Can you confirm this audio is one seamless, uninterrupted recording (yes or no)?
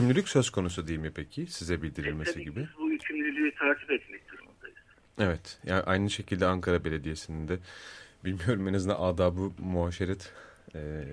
yes